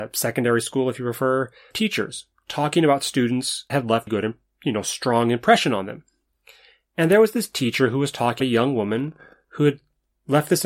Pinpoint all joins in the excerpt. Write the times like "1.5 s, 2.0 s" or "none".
1.7 s, 3.7 s, 4.1 s, 8.4 s